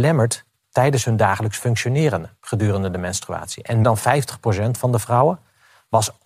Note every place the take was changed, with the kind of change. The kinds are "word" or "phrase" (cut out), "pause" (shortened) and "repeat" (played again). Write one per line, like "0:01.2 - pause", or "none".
0:02.4 - pause
0:03.8 - word